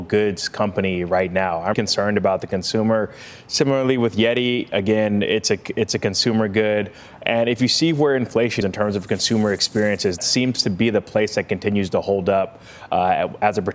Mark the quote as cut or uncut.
cut